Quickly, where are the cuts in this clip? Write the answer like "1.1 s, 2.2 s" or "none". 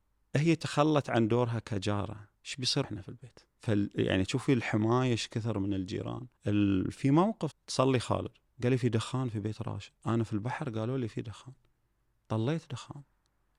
2.4 s, 2.8 s, 3.5 s, 6.4 s, 7.5 s, 8.5 s, 10.0 s